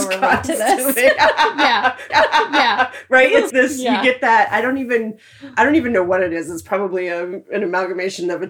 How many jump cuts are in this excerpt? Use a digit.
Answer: 2